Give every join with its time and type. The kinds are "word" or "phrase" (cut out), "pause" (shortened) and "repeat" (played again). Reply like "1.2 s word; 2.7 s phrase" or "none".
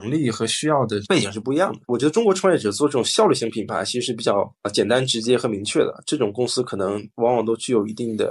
1.8 s pause